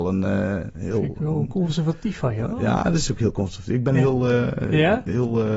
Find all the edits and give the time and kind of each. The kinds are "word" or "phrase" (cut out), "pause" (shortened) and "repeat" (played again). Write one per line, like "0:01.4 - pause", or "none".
none

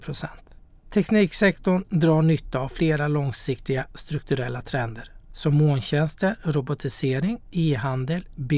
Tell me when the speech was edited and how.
none

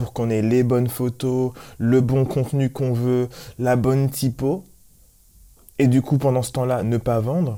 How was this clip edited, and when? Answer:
none

